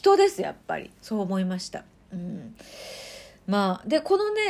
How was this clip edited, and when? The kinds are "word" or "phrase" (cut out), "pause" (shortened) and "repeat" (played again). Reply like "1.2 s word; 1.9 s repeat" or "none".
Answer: 1.9 s pause